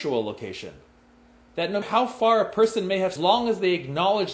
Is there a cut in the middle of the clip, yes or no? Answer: yes